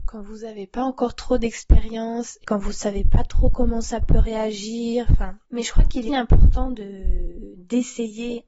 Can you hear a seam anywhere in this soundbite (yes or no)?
yes